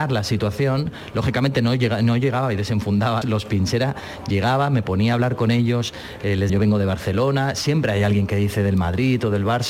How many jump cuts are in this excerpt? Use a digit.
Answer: 2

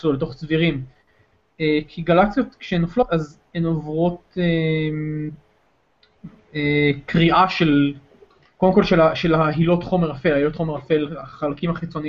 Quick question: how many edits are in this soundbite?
1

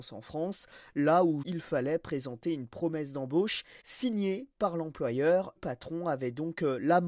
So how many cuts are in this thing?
3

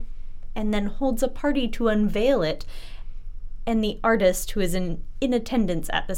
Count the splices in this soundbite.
0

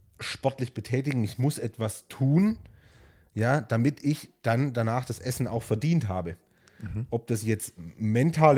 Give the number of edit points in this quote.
0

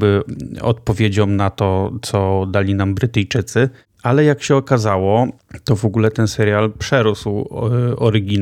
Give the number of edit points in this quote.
0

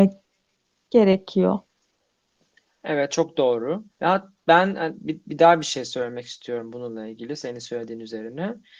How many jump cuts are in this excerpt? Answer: 1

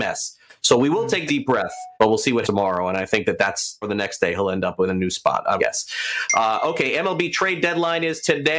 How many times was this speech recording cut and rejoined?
5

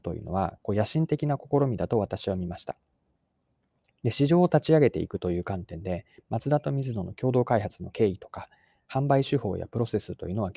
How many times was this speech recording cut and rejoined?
0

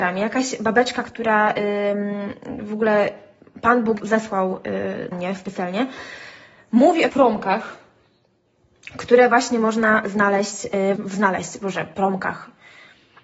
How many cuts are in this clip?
4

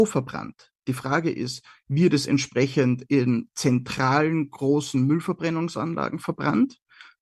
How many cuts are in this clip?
0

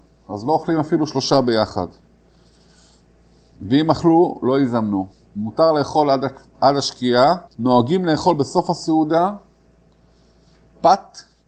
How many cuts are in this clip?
2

